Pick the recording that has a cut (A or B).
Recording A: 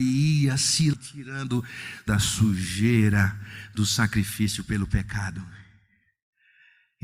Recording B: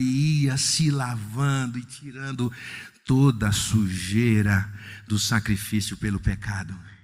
A